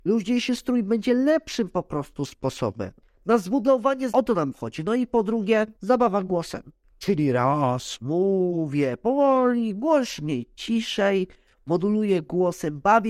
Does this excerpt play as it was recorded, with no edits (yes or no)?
no